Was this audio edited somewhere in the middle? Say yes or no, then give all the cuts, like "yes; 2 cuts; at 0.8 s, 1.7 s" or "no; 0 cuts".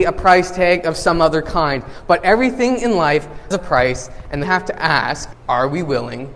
yes; 3 cuts; at 3.5 s, 4.4 s, 5.3 s